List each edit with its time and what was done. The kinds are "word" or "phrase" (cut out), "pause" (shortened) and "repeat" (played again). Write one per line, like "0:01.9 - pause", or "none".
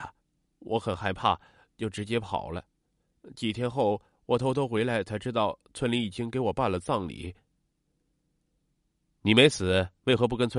none